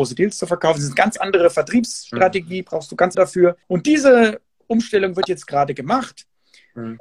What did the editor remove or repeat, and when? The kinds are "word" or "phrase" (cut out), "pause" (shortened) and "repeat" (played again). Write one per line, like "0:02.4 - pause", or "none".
0:03.1 - phrase
0:03.6 - pause